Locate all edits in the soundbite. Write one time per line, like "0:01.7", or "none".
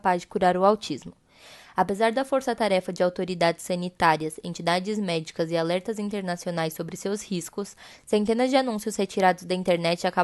none